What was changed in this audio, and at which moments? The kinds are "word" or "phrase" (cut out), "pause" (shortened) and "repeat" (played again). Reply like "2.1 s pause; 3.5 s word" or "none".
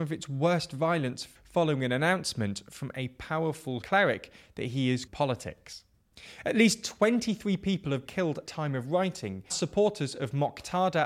1.3 s word; 3.8 s word; 5.1 s word; 8.0 s word; 8.5 s word; 9.5 s word